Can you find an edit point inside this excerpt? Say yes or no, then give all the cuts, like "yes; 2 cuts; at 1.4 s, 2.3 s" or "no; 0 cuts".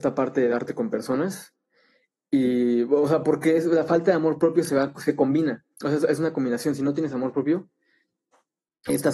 yes; 1 cut; at 5.7 s